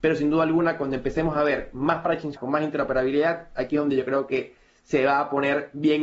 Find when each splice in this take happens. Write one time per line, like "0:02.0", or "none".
0:02.4